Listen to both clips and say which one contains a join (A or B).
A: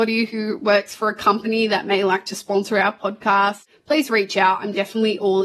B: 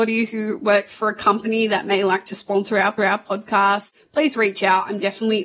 B